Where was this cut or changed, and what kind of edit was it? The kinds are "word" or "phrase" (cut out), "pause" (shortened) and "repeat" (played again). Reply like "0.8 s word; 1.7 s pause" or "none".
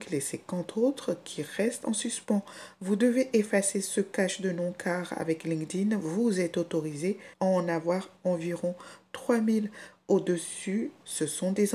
7.3 s pause

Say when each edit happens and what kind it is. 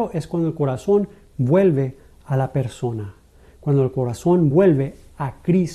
none

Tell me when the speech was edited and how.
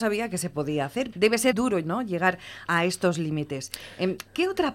1.1 s word; 1.5 s word; 2.7 s word

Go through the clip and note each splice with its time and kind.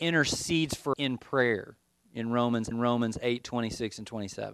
0.9 s word; 2.7 s repeat

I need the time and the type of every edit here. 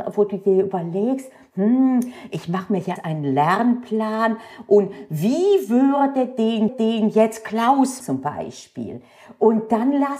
3.0 s word; 6.7 s repeat; 8.0 s word

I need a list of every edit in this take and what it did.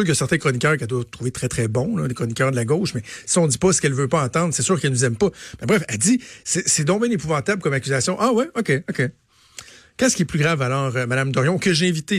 none

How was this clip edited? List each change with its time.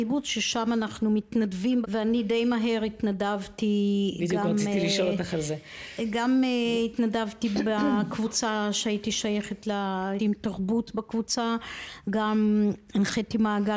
1.8 s phrase; 10.2 s word

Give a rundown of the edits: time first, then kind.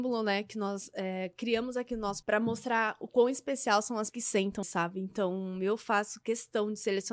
2.2 s word; 4.1 s word; 4.6 s word

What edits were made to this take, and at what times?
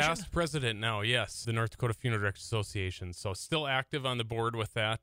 1.4 s word; 3.4 s word

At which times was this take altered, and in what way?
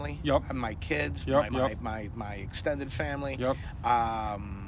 1.5 s word

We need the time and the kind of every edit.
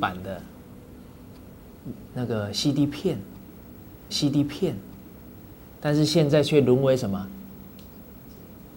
4.1 s repeat

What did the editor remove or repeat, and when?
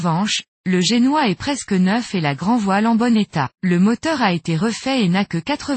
3.5 s pause

